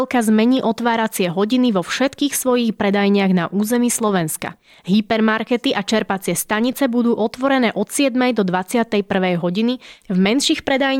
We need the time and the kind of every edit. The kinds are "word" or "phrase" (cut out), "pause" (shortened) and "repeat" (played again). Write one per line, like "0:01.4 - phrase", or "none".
none